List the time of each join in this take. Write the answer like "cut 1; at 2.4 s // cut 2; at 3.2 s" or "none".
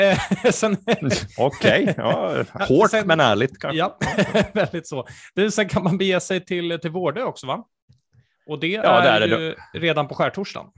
none